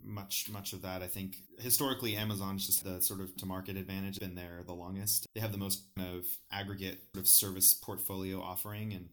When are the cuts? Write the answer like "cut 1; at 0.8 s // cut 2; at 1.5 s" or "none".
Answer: cut 1; at 1.5 s // cut 2; at 2.8 s // cut 3; at 3.4 s // cut 4; at 4.2 s // cut 5; at 5.3 s // cut 6; at 6.0 s // cut 7; at 7.1 s